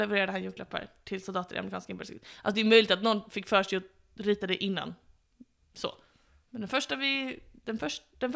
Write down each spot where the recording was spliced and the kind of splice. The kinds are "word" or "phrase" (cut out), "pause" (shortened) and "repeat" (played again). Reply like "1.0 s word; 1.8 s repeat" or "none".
none